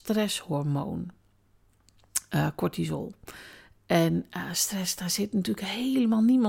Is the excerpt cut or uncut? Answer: uncut